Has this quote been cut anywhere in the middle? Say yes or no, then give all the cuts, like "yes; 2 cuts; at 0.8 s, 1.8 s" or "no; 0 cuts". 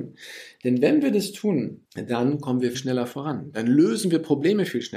yes; 2 cuts; at 1.9 s, 2.7 s